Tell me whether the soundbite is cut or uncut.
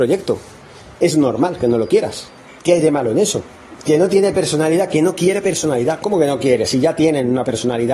cut